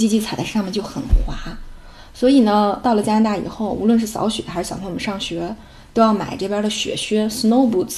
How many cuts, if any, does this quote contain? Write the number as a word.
one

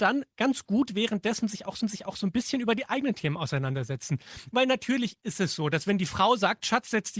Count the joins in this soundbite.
one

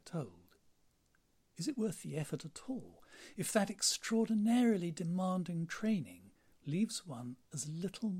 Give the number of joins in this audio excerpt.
one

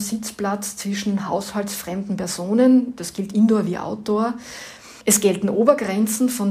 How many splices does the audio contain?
one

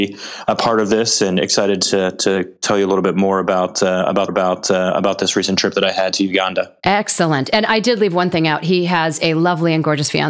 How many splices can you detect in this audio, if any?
three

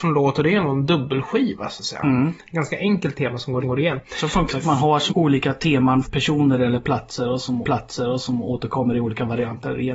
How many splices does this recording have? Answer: five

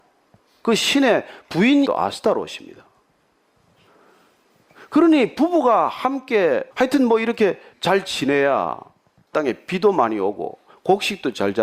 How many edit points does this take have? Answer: four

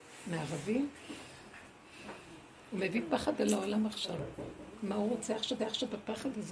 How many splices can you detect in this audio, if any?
one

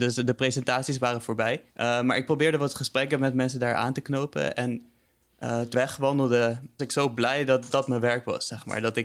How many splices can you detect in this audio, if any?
four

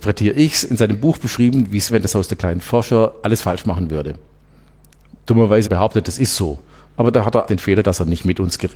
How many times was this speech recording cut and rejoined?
four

